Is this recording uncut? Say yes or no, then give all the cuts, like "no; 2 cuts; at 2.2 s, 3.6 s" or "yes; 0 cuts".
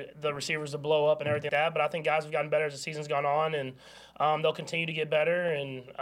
no; 1 cut; at 1.5 s